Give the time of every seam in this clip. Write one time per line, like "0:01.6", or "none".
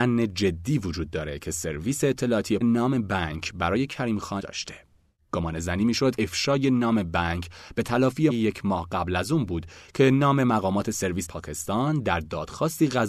0:02.6
0:04.4
0:06.2
0:08.3
0:11.2